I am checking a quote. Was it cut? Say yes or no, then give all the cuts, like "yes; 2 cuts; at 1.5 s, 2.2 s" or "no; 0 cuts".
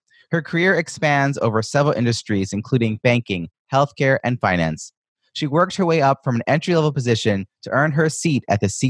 no; 0 cuts